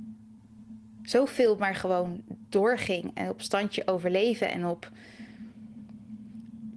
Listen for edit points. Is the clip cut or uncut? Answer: uncut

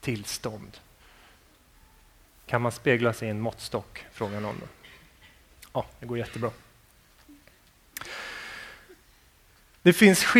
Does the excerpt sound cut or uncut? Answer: uncut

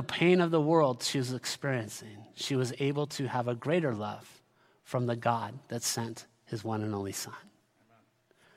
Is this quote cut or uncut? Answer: uncut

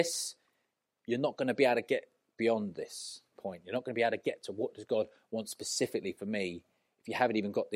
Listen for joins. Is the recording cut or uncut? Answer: uncut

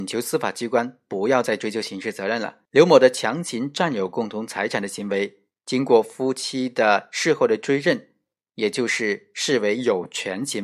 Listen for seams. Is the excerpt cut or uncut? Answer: cut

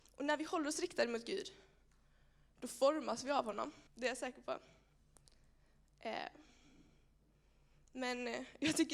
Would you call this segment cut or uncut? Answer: cut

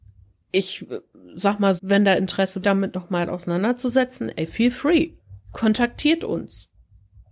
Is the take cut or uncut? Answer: cut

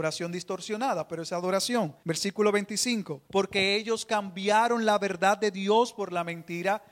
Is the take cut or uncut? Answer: cut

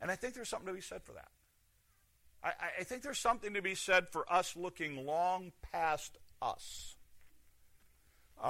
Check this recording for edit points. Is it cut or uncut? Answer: uncut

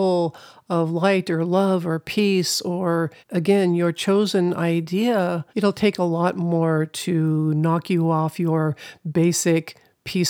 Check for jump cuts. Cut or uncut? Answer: cut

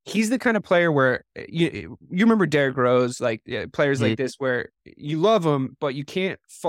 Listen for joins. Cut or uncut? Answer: cut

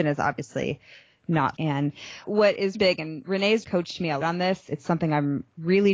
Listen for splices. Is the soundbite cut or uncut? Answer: cut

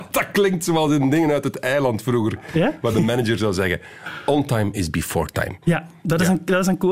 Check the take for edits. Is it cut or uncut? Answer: uncut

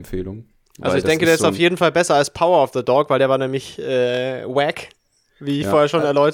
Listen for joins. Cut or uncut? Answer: uncut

